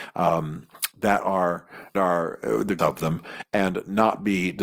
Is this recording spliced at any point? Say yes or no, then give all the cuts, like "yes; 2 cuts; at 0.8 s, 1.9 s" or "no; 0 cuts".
yes; 2 cuts; at 1.9 s, 2.8 s